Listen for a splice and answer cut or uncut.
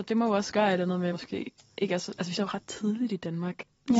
cut